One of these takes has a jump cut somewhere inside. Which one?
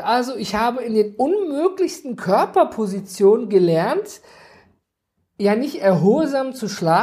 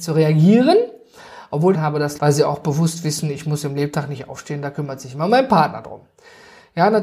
second; 2 cuts; at 1.7 s, 2.2 s

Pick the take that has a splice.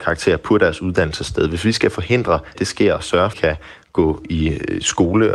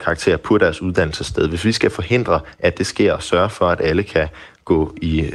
first; 2 cuts; at 2.5 s, 3.3 s

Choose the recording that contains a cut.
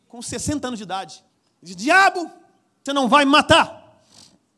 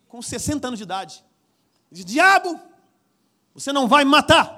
first; 2 cuts; at 1.3 s, 2.9 s

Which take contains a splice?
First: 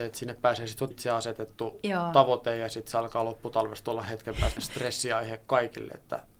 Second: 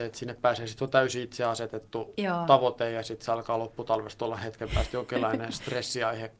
first; 2 cuts; at 0.9 s, 4.6 s

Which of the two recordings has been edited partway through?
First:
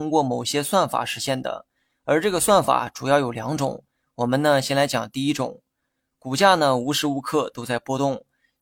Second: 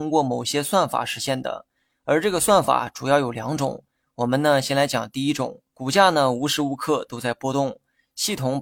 second; 1 cut; at 5.7 s

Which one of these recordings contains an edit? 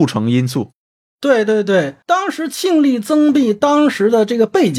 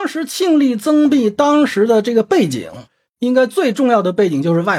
first; 1 cut; at 2.0 s

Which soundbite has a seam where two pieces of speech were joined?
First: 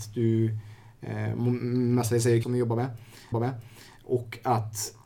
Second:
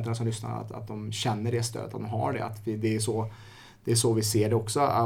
first; 2 cuts; at 2.4 s, 3.3 s

